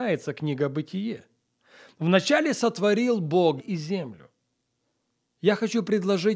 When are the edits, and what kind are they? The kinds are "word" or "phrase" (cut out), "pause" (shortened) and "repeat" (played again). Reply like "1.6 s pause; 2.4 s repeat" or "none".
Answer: 3.6 s word